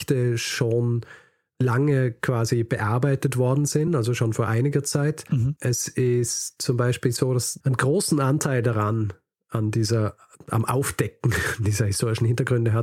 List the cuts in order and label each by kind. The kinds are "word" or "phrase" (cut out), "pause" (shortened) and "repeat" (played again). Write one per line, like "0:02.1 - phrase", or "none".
none